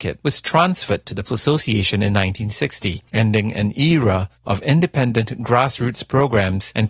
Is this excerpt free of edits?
no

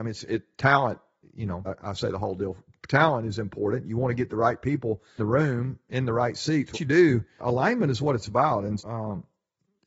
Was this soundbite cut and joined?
yes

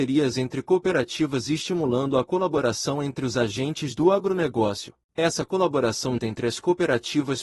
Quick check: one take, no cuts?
no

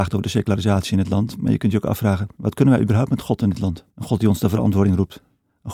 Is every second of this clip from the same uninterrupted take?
no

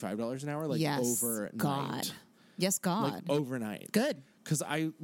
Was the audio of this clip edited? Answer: no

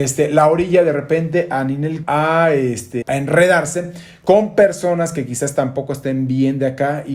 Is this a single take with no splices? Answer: no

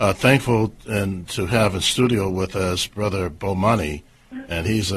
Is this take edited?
no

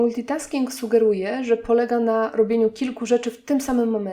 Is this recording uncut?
yes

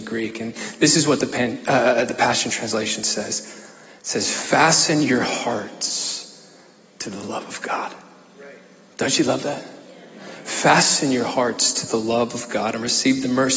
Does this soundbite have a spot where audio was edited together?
no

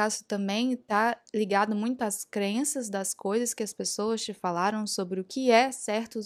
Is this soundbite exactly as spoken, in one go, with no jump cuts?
yes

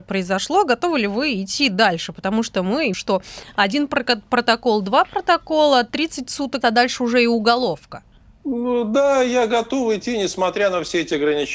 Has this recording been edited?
yes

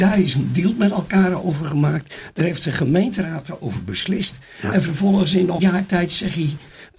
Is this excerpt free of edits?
no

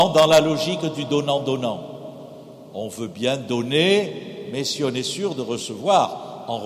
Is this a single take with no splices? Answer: yes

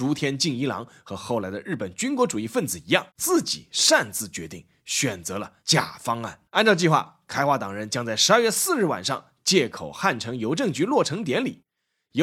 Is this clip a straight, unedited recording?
no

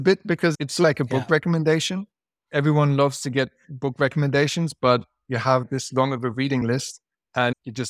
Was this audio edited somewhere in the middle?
no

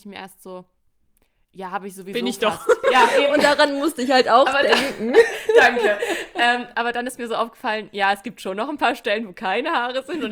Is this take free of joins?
yes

